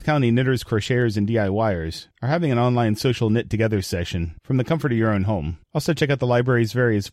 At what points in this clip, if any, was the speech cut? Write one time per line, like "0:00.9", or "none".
none